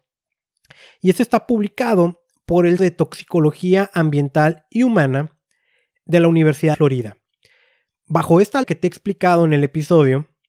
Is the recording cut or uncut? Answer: cut